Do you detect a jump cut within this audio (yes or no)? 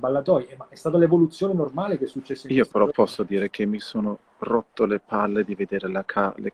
no